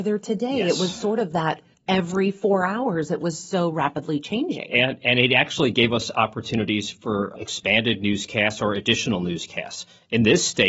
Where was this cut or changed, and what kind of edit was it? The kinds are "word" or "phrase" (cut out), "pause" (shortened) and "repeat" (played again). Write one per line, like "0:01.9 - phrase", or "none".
0:01.7 - pause
0:07.4 - word